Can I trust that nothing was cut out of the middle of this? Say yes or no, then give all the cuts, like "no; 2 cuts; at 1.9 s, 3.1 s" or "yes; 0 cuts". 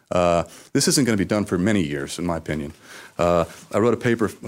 yes; 0 cuts